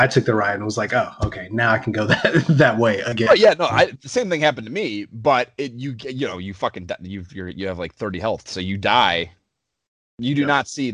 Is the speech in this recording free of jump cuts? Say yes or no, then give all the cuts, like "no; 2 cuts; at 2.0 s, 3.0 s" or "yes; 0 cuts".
yes; 0 cuts